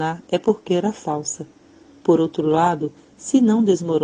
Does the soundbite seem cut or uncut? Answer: uncut